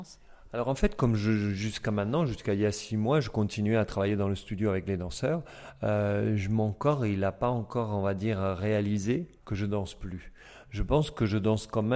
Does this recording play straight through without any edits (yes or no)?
no